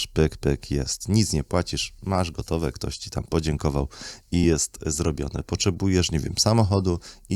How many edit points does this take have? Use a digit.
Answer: 0